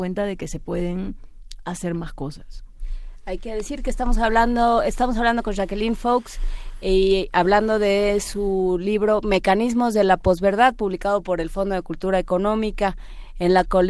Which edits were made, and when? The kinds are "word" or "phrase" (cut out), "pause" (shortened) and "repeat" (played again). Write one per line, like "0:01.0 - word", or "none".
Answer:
none